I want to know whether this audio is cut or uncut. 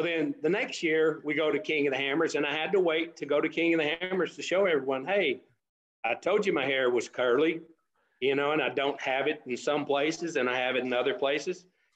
uncut